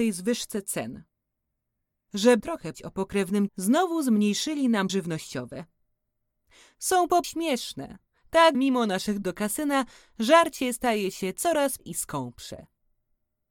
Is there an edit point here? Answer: yes; 8 cuts; at 2.4 s, 2.7 s, 3.5 s, 4.9 s, 7.2 s, 8.5 s, 9.2 s, 11.8 s

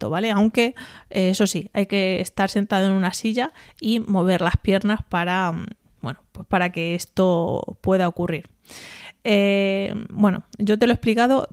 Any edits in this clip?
no; 0 cuts

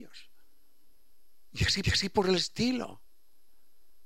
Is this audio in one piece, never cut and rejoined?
no; 1 cut; at 1.8 s

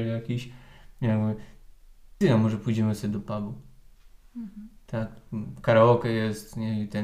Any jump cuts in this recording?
yes; 1 cut; at 2.2 s

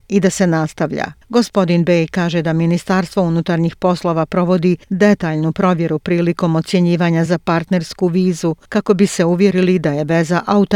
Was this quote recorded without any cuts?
no; 4 cuts; at 1.2 s, 4.8 s, 7.3 s, 8.6 s

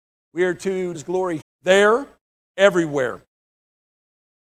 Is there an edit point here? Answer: yes; 2 cuts; at 0.9 s, 1.4 s

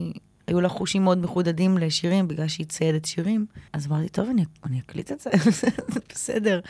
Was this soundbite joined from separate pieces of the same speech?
yes; 1 cut; at 3.7 s

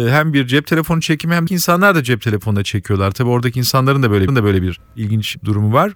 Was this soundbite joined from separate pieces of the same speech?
yes; 2 cuts; at 1.5 s, 4.3 s

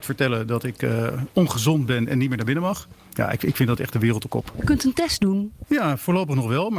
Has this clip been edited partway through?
yes; 1 cut; at 4.3 s

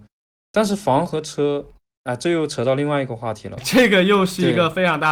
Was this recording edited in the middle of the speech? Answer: no; 0 cuts

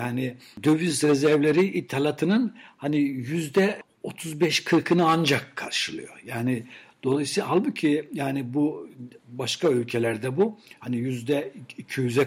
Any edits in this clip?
no; 0 cuts

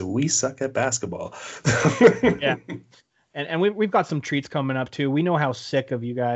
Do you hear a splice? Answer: no; 0 cuts

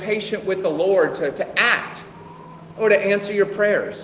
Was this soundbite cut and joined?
no; 0 cuts

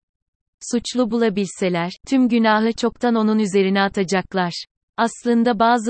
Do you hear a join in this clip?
no; 0 cuts

